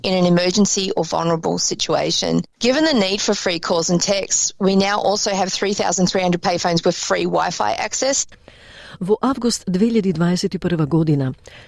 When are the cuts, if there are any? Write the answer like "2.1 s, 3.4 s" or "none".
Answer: none